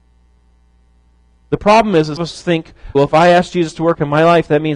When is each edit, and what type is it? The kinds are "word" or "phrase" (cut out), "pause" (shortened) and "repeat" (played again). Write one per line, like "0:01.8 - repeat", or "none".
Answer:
0:02.2 - phrase
0:02.9 - phrase